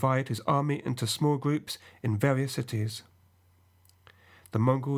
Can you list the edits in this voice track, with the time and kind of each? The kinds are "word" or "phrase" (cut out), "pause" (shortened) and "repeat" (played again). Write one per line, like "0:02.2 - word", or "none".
none